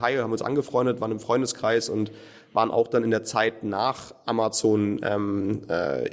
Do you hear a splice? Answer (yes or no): no